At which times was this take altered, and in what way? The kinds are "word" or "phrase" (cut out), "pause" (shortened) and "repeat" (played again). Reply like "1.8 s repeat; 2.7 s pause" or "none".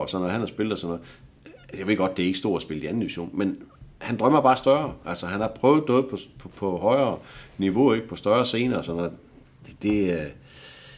none